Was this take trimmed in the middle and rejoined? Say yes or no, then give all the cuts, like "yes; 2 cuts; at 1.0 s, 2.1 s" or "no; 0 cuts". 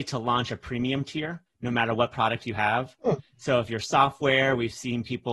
yes; 1 cut; at 1.5 s